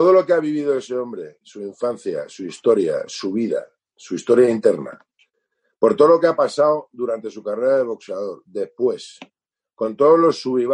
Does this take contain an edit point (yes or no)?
no